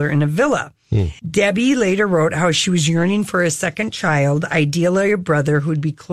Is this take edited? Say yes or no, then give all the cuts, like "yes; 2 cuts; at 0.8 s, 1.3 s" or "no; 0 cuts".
yes; 1 cut; at 1.2 s